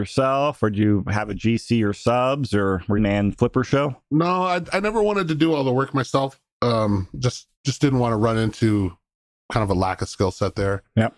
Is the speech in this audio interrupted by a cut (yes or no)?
yes